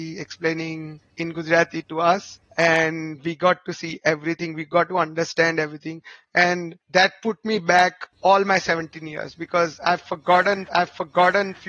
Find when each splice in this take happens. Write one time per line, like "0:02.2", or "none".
0:01.1
0:10.7